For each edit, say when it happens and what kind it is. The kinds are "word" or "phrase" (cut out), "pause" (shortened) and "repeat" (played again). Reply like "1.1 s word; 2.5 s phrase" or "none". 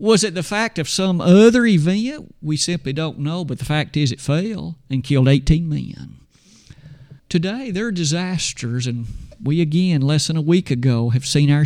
7.2 s pause